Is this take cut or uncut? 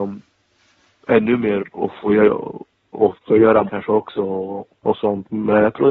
cut